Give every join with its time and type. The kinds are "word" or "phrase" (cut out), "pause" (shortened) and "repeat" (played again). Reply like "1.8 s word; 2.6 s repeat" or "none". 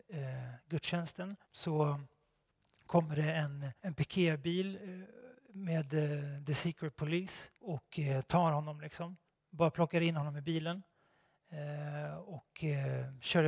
1.4 s pause; 3.8 s pause; 7.5 s pause; 9.3 s pause